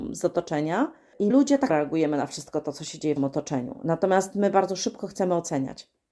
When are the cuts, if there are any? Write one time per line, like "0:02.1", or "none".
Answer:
0:01.3
0:01.7
0:03.2